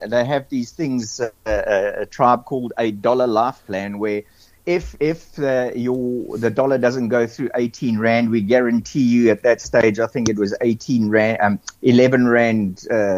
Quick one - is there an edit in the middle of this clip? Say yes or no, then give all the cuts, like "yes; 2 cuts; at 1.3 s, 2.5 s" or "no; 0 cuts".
no; 0 cuts